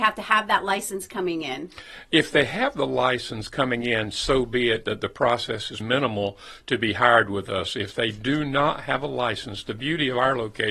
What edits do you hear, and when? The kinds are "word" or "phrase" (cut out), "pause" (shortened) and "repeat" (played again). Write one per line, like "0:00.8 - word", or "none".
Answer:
0:05.8 - word